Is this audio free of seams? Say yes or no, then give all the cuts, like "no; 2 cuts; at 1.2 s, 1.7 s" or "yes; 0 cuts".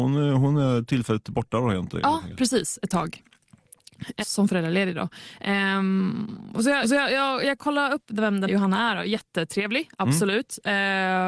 no; 3 cuts; at 4.2 s, 6.8 s, 8.5 s